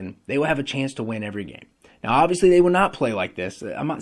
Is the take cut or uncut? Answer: uncut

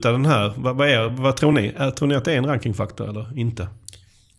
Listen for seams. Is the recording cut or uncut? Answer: uncut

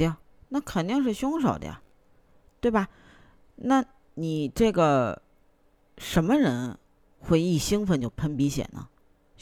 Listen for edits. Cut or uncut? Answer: uncut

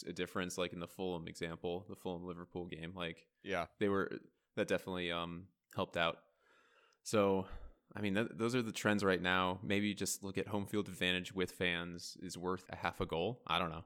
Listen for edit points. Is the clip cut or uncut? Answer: cut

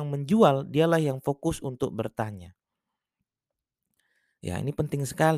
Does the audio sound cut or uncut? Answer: uncut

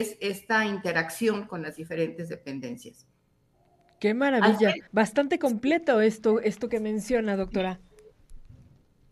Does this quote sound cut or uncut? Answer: cut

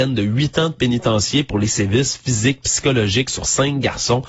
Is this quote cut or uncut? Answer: uncut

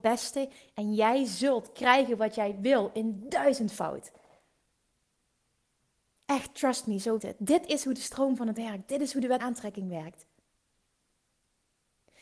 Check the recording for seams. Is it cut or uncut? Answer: cut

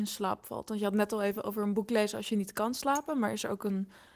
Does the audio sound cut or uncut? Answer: uncut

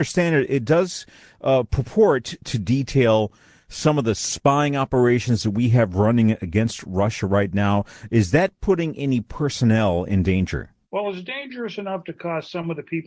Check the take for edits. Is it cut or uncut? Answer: cut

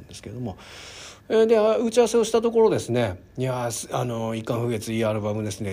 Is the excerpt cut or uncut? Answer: cut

